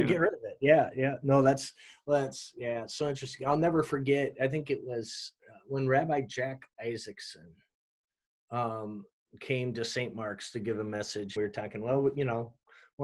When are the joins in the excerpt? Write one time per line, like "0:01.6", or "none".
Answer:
0:11.4